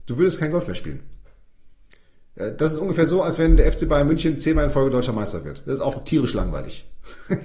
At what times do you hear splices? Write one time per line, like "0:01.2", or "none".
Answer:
none